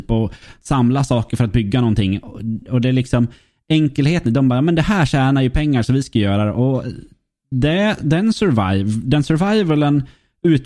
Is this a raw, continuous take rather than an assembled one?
yes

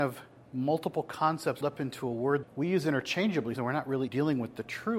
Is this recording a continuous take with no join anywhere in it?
no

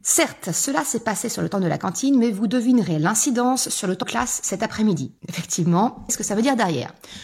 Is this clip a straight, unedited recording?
no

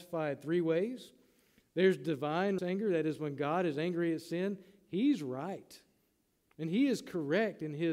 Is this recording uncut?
no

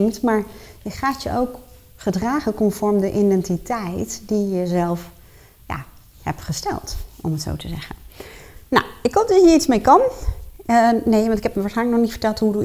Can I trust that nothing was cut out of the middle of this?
yes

